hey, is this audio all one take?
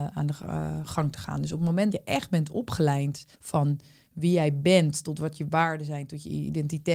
no; 2 cuts; at 1.9 s, 3.3 s

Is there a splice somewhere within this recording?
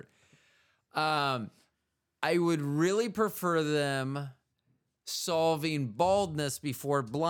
no; 0 cuts

